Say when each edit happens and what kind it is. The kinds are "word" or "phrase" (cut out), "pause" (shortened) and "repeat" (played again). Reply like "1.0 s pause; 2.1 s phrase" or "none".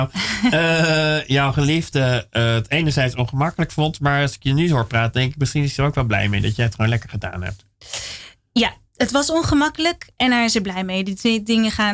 none